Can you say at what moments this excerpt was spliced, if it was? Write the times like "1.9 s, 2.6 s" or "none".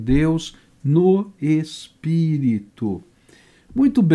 none